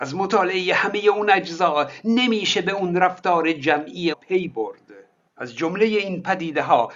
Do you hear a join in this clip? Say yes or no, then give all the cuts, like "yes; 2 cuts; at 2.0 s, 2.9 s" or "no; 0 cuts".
yes; 1 cut; at 4.1 s